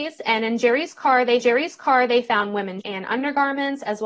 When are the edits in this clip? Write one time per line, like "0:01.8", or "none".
0:01.4
0:02.8

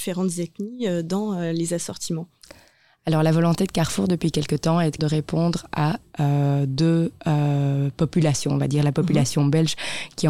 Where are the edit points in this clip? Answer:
0:05.0

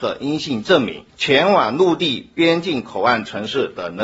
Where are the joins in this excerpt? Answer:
0:01.1

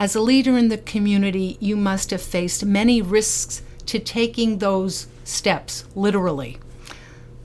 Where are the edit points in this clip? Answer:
none

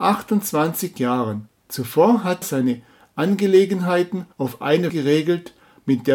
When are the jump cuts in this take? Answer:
0:01.6
0:02.4
0:04.3
0:04.9

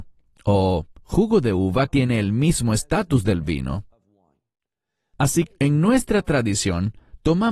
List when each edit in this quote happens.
0:01.9
0:05.5

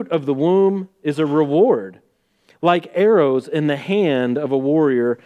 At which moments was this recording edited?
none

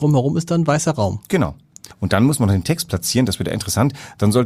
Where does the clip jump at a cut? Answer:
0:01.9

